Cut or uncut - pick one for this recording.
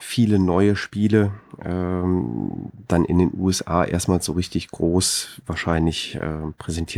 uncut